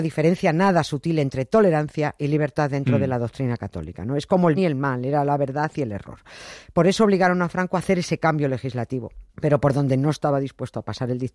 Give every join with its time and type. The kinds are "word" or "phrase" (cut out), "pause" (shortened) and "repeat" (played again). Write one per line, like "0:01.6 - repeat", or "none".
0:04.6 - word
0:09.3 - pause